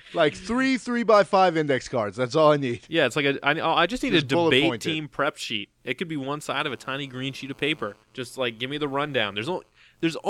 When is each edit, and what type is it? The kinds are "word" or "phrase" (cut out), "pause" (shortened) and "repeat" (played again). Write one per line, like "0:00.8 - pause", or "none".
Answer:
0:08.0 - pause